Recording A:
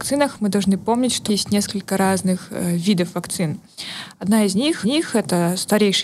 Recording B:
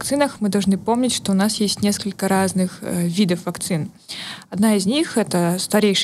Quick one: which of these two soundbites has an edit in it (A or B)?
A